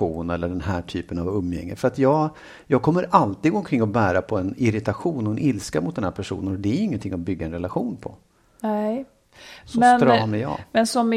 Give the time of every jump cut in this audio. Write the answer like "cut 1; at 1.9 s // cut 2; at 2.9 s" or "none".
none